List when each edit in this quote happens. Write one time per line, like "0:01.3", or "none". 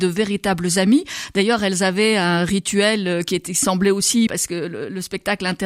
0:04.3